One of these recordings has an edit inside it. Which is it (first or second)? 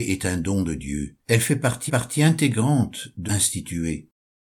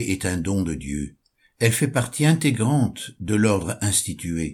first